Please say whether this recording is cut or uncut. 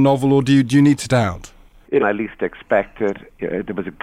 cut